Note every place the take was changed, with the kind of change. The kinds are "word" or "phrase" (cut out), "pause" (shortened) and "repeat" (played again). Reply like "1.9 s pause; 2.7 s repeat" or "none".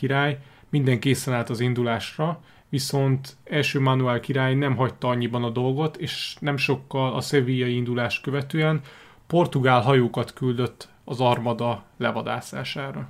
none